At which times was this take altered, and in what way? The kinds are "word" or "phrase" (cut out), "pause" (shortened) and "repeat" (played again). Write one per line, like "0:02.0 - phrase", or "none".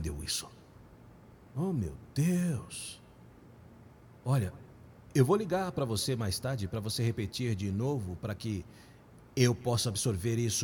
none